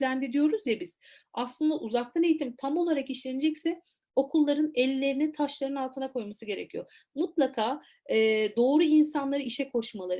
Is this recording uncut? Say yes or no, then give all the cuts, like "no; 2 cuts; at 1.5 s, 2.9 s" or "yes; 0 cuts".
yes; 0 cuts